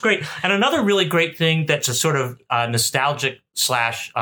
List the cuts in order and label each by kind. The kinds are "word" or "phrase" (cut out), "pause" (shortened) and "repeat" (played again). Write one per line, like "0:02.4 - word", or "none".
none

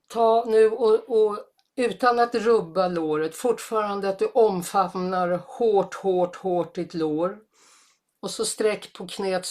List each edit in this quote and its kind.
none

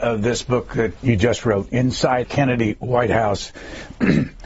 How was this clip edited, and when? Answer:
0:01.0 - word
0:02.2 - word

